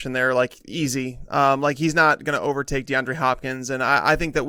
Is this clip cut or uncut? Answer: uncut